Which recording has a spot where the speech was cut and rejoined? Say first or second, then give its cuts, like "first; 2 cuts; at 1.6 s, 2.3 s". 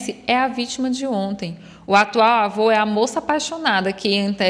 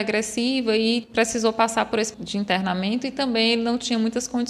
second; 2 cuts; at 1.0 s, 2.1 s